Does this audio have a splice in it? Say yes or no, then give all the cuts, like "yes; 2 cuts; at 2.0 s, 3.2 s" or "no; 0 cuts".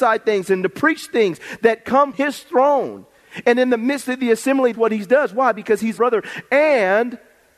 yes; 3 cuts; at 2.1 s, 4.7 s, 6.0 s